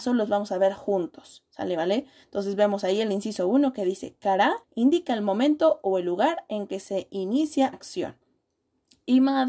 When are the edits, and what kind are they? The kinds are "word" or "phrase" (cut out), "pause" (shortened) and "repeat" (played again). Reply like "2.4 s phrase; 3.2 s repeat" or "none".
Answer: 4.6 s pause; 7.7 s word